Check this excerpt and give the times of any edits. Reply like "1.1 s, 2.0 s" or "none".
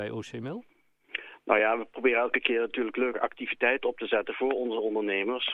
none